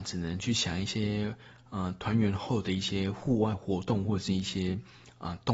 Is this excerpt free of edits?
yes; 0 cuts

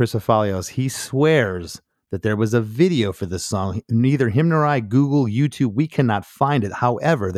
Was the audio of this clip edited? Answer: no; 0 cuts

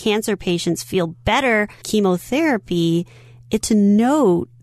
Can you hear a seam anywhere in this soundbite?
yes; 2 cuts; at 1.8 s, 3.6 s

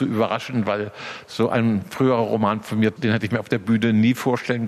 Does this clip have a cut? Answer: yes; 1 cut; at 3.0 s

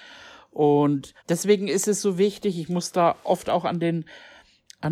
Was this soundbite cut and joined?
yes; 1 cut; at 1.2 s

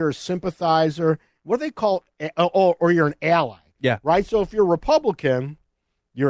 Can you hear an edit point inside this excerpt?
no; 0 cuts

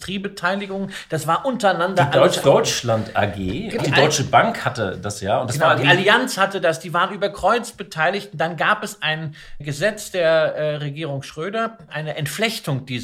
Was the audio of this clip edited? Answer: yes; 4 cuts; at 2.4 s, 3.8 s, 9.6 s, 11.9 s

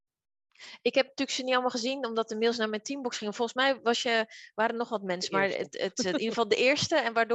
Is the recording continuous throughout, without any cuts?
yes; 0 cuts

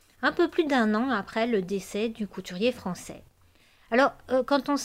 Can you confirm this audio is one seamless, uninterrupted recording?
yes; 0 cuts

